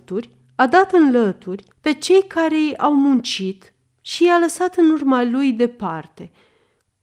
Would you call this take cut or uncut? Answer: cut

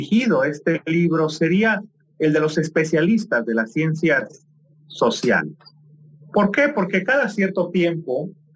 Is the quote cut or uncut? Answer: uncut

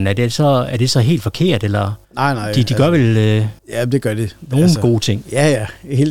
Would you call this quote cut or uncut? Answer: cut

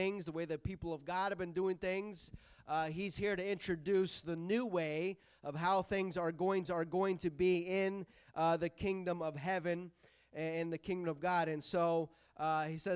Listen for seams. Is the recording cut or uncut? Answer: cut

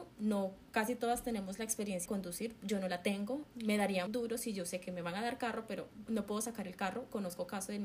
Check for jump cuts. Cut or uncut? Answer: cut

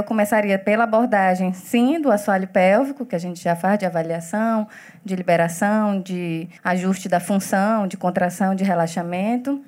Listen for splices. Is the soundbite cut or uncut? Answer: cut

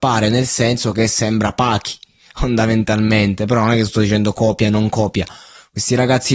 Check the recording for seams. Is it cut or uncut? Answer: uncut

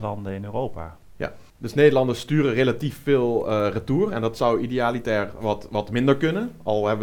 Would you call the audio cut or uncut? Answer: cut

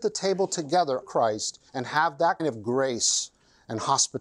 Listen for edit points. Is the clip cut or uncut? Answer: cut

